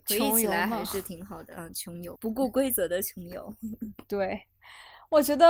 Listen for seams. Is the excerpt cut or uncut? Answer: uncut